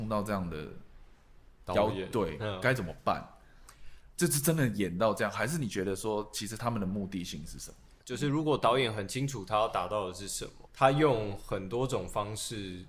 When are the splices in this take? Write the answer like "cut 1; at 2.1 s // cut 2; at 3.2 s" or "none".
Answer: cut 1; at 10.7 s

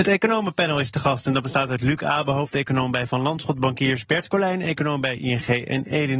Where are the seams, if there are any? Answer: none

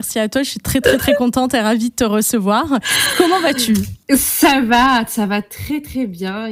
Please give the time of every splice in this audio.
cut 1; at 4.0 s

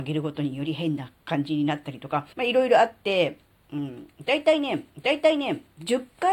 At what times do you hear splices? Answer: cut 1; at 2.3 s // cut 2; at 4.9 s

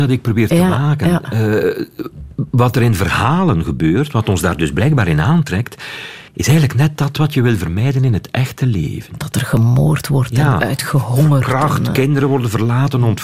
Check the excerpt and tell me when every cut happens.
cut 1; at 6.3 s

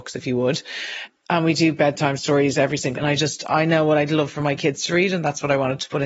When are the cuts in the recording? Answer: cut 1; at 3.0 s

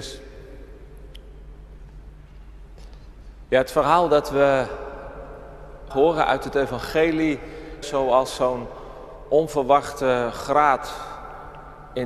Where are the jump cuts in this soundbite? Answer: cut 1; at 5.9 s // cut 2; at 7.8 s

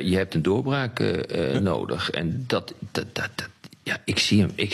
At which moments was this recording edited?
none

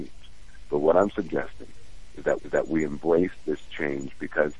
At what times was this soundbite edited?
cut 1; at 2.4 s

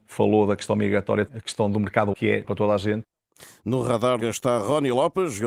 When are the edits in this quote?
cut 1; at 1.3 s // cut 2; at 2.1 s // cut 3; at 2.4 s // cut 4; at 4.2 s

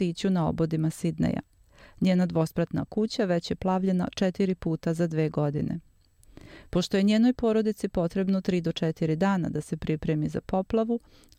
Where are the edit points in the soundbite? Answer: none

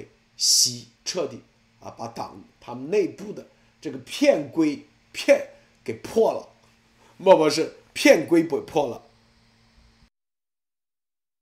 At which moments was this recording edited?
cut 1; at 1.0 s

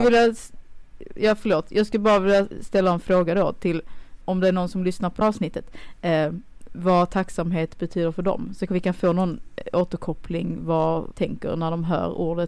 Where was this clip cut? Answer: cut 1; at 4.2 s // cut 2; at 5.2 s // cut 3; at 8.7 s // cut 4; at 11.1 s

